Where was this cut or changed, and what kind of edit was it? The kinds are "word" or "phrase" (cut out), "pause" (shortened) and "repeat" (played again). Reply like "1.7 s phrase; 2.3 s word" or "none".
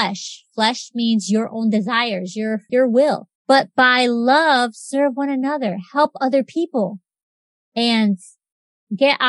2.7 s word; 3.4 s pause

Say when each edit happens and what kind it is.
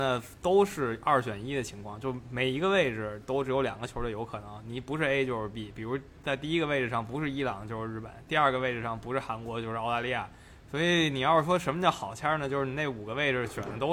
none

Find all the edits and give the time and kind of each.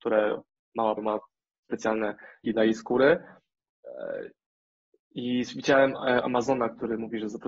1.0 s word; 2.4 s word; 6.2 s word

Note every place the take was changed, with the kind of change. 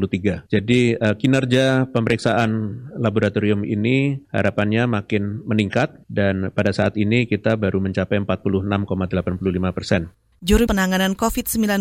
4.2 s pause; 10.7 s phrase

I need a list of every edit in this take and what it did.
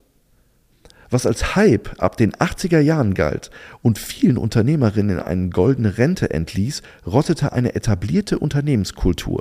none

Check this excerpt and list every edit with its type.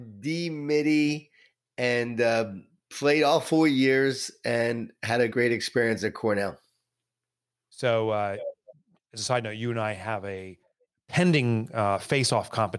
5.3 s word

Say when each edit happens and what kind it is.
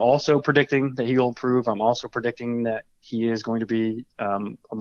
none

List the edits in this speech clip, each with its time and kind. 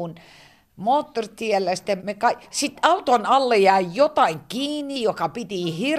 2.0 s word

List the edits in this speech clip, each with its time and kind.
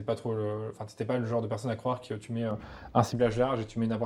none

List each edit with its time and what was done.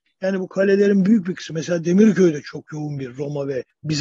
none

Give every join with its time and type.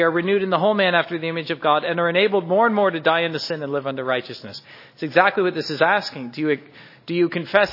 none

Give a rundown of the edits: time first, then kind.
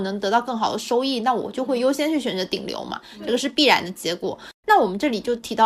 4.5 s pause

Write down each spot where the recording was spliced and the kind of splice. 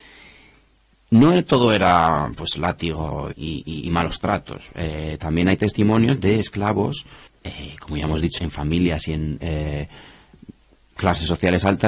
3.3 s word; 7.3 s pause; 8.4 s word

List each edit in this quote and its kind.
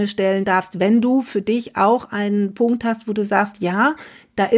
none

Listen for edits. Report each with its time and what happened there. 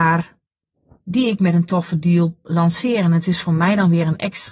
none

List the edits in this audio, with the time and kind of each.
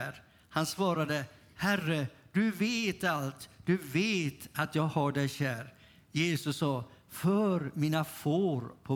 none

